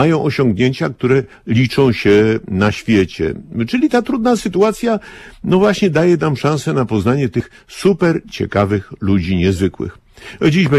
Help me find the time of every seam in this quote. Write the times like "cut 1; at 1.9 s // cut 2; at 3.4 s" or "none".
none